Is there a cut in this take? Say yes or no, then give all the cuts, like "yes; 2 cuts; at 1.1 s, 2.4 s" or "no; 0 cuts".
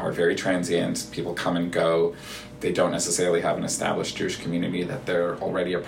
no; 0 cuts